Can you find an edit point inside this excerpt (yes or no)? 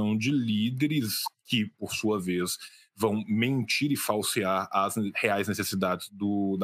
no